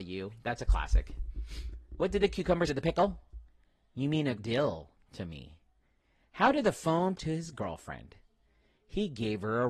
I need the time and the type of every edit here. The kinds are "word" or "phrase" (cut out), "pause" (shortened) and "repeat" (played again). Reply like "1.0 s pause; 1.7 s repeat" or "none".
2.7 s word; 4.3 s word; 7.1 s word